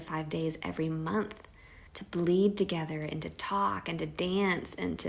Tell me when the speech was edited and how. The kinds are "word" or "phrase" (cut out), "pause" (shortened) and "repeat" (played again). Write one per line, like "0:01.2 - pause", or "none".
0:01.9 - pause

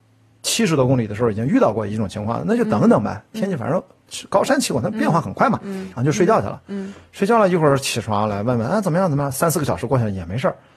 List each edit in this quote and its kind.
0:06.0 - phrase

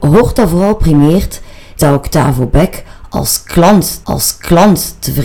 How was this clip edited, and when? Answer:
0:01.8 - word
0:04.0 - repeat

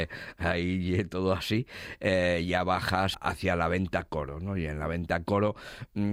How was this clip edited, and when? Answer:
0:03.1 - word

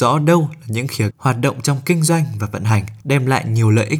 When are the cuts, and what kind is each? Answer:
0:01.1 - word
0:03.0 - pause

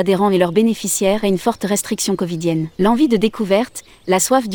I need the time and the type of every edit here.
0:01.2 - word
0:02.7 - pause

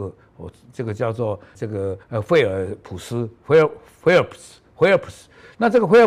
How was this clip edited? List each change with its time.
0:01.5 - word
0:02.0 - pause

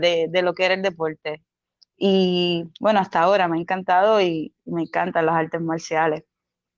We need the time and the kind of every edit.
none

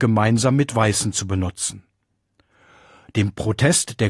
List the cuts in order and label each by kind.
none

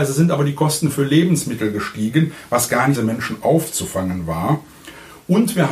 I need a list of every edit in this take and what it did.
0:03.0 - phrase

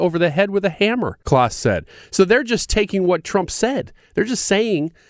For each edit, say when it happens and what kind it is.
0:01.2 - pause

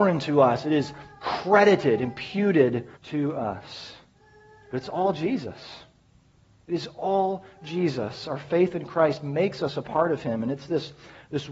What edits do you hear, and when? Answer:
0:03.0 - pause

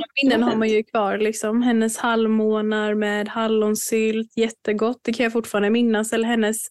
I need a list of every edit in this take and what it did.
none

